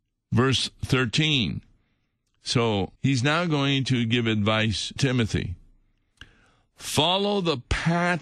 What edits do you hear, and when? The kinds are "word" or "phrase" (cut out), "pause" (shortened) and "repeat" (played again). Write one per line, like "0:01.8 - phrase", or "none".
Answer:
0:03.0 - pause
0:05.0 - word